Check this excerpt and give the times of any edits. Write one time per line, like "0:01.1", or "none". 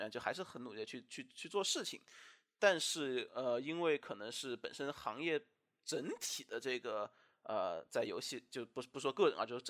none